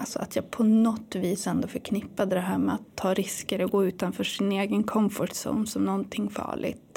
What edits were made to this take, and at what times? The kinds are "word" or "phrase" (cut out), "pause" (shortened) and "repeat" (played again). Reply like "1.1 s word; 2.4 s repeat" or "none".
none